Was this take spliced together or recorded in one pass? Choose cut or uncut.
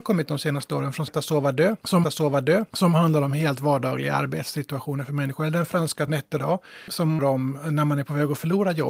cut